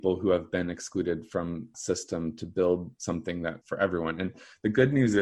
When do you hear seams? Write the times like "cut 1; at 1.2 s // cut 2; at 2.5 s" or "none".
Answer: cut 1; at 1.7 s // cut 2; at 3.6 s